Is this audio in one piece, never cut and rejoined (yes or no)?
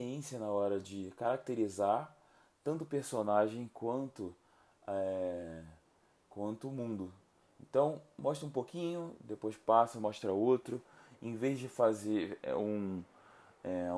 yes